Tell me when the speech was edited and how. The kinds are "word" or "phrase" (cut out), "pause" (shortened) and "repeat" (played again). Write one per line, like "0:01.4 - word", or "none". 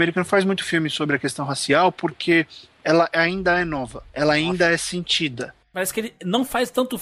0:04.1 - pause